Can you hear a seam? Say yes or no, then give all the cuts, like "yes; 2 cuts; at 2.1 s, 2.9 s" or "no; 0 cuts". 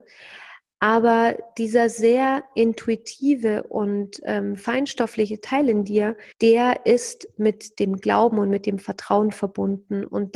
yes; 1 cut; at 6.3 s